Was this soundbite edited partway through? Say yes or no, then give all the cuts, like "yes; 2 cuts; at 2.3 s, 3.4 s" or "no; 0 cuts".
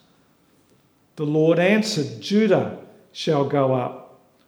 no; 0 cuts